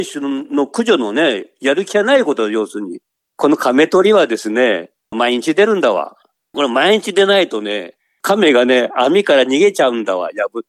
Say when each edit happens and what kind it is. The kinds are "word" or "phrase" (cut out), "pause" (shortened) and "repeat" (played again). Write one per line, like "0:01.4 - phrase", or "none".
none

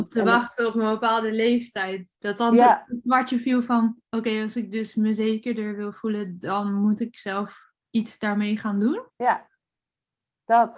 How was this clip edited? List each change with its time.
0:02.1 - pause
0:04.1 - pause
0:07.8 - pause
0:09.1 - pause

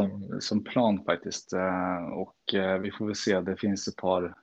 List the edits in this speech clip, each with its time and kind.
none

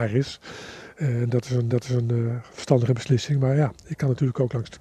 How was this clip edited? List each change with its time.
0:01.7 - repeat

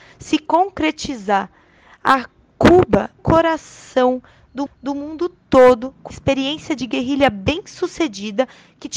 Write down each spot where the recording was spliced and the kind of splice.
0:03.2 - phrase
0:04.7 - repeat
0:06.1 - word

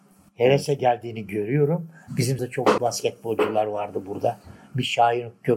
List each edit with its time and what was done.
0:02.4 - word
0:02.8 - word

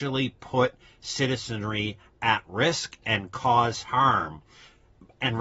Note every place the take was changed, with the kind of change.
none

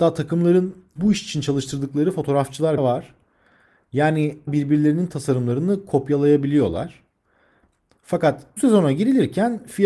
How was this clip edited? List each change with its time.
0:01.0 - word
0:02.8 - word
0:04.5 - word
0:08.6 - word

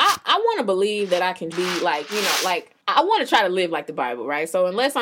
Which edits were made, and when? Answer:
0:01.5 - word
0:02.8 - pause

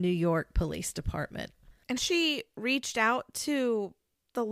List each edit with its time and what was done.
0:02.0 - word

